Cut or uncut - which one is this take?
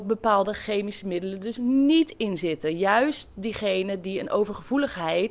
uncut